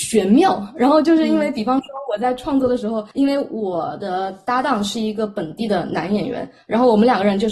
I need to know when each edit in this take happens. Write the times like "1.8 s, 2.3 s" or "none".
3.1 s